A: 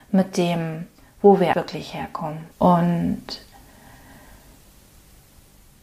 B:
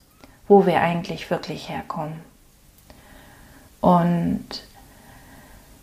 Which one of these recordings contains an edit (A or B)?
A